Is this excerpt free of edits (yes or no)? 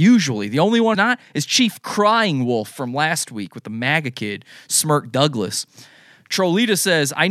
no